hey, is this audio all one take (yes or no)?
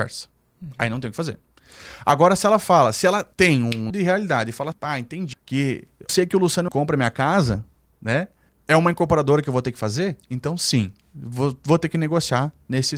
no